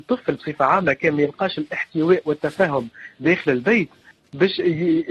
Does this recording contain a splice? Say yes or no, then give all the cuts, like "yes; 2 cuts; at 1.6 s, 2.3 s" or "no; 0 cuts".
no; 0 cuts